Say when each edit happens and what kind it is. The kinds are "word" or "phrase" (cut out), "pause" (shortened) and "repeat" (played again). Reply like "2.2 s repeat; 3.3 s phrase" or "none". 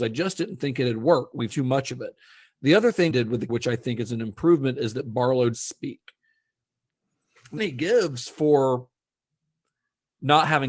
1.5 s word; 3.1 s word; 3.5 s word; 5.5 s word; 7.6 s word